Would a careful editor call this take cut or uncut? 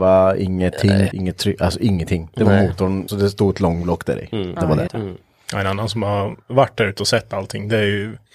cut